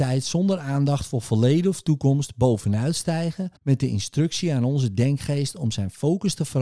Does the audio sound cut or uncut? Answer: cut